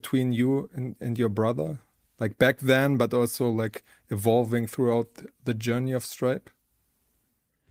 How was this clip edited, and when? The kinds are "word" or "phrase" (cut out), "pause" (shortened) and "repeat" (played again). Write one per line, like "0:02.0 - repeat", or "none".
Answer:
none